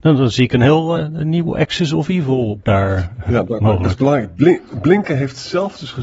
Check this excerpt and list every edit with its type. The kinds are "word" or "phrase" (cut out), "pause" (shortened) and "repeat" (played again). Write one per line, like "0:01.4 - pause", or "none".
0:01.0 - word
0:02.6 - word